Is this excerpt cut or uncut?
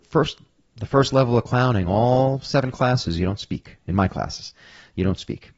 uncut